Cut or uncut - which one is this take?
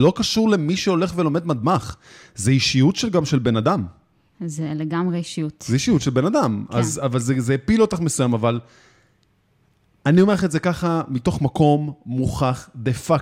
uncut